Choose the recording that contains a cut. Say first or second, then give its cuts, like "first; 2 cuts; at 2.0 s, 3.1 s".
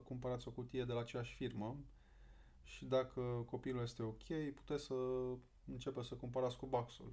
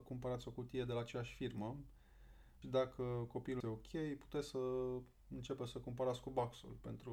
second; 2 cuts; at 2.6 s, 3.6 s